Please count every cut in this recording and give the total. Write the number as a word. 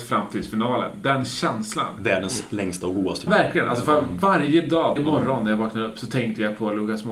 two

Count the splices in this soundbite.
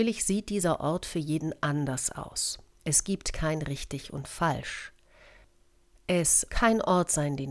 one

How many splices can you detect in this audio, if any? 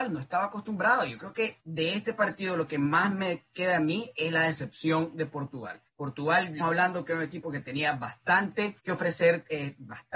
four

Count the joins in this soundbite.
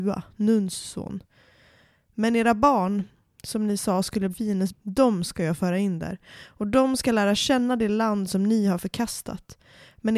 two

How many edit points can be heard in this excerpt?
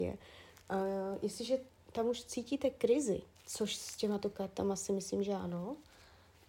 one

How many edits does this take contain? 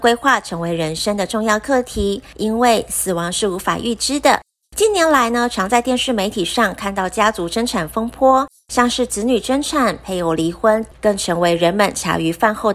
one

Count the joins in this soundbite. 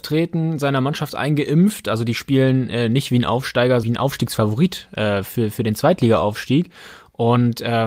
one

